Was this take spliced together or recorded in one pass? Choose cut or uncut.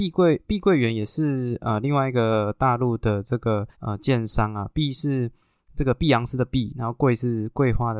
cut